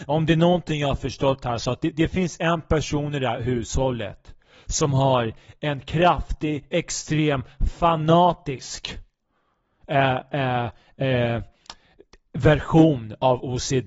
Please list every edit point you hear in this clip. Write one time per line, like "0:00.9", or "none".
none